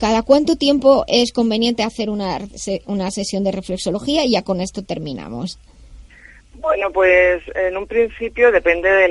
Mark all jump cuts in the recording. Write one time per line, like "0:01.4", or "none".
none